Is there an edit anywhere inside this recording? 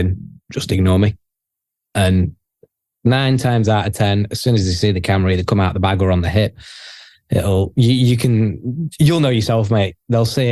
no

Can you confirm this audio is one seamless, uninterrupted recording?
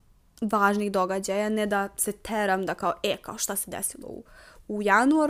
yes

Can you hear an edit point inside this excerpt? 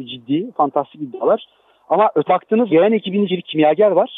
yes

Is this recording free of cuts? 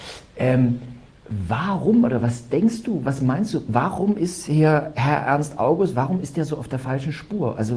no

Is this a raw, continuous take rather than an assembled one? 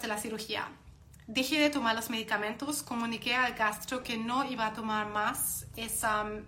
yes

